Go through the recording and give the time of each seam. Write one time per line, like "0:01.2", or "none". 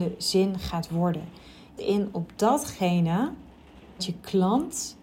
0:01.8
0:04.0